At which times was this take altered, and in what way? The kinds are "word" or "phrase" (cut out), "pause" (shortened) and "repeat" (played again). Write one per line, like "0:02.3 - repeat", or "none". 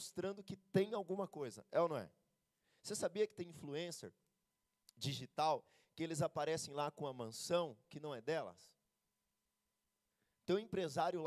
none